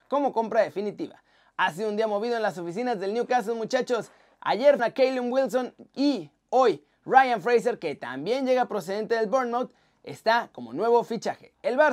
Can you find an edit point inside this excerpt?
yes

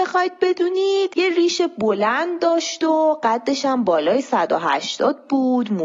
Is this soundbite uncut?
yes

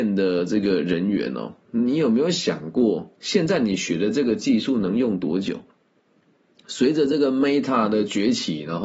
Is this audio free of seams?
yes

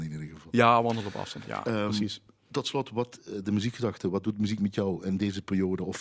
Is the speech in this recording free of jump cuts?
yes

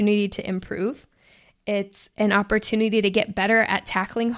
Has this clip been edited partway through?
no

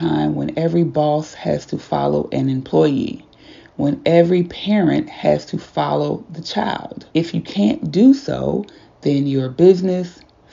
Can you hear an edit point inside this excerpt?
yes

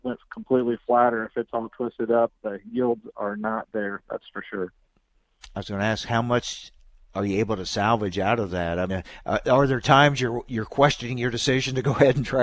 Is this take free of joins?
no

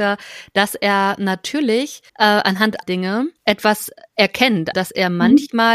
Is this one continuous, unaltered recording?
no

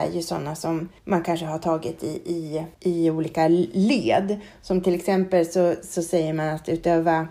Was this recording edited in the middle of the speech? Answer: yes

